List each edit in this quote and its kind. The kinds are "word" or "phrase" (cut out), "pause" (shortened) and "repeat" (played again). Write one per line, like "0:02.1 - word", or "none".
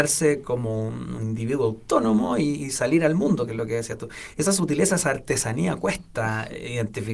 none

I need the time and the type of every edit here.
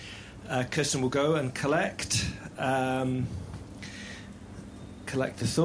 none

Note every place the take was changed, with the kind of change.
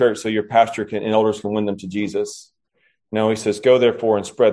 none

